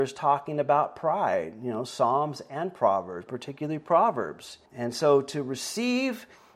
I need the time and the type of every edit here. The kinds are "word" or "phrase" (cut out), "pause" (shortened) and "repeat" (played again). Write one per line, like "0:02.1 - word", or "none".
0:03.3 - word
0:04.7 - pause